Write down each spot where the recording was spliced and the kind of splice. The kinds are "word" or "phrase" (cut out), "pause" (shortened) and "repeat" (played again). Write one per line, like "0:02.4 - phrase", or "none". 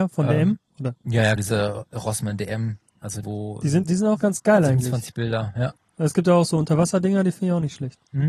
0:01.4 - word
0:03.2 - word
0:03.8 - word